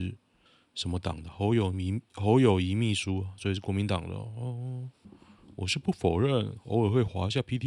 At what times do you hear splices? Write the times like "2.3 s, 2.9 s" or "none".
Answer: none